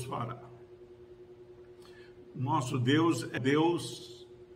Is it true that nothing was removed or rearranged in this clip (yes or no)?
no